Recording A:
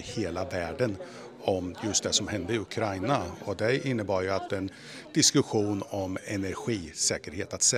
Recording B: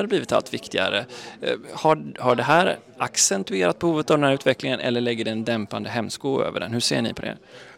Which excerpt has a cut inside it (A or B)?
A